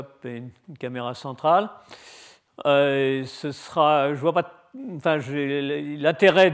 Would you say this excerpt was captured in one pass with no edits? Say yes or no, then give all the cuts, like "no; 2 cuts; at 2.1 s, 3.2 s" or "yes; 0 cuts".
yes; 0 cuts